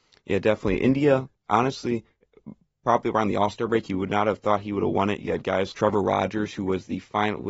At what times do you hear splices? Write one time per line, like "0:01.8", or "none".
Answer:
0:05.7